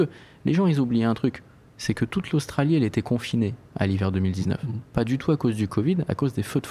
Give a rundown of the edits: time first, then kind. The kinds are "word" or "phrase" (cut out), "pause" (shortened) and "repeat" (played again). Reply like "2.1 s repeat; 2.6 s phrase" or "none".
none